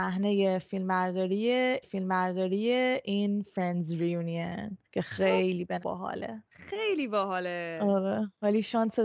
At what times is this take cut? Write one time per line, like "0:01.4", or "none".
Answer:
0:01.8
0:04.8
0:05.8
0:06.5